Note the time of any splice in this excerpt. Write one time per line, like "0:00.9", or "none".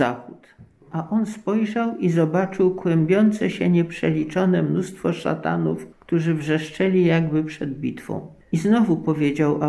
0:05.9
0:08.4